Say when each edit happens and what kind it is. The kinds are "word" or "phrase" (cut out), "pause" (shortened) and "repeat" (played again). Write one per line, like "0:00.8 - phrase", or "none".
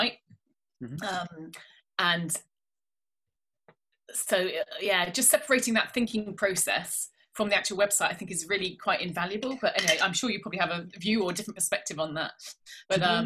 none